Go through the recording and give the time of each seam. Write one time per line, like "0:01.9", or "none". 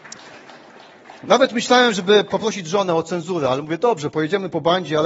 none